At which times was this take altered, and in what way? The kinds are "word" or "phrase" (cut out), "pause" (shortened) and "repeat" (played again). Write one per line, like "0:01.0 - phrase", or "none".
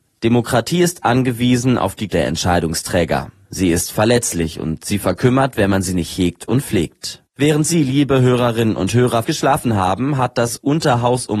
0:02.1 - word
0:07.3 - pause
0:09.2 - word